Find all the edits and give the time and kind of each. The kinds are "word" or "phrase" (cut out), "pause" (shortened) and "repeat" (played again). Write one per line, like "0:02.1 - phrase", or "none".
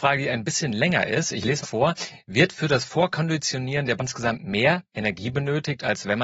0:01.6 - word
0:04.0 - word

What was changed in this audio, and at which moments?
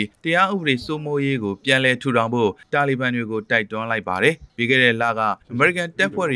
0:05.4 - pause

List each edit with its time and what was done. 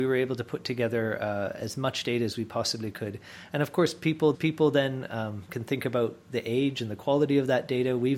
0:04.3 - repeat

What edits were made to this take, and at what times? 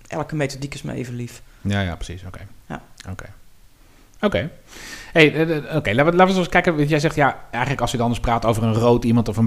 none

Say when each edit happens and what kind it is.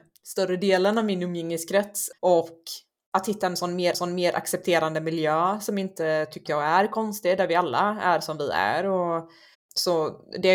0:02.2 - pause
0:03.9 - repeat
0:06.5 - word
0:09.5 - pause

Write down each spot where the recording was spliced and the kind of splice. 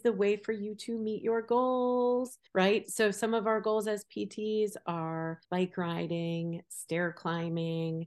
0:02.5 - pause
0:05.4 - pause

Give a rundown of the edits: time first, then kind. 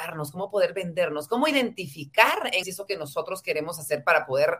0:02.6 - phrase

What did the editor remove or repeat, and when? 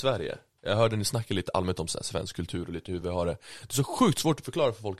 none

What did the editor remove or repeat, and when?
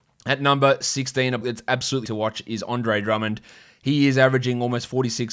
0:01.4 - word
0:02.0 - word

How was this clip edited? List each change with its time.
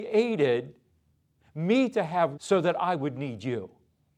0:02.4 - word

